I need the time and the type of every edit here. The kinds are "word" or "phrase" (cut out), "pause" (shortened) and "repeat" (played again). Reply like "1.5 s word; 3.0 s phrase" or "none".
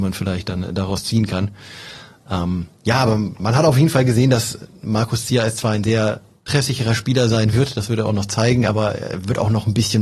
none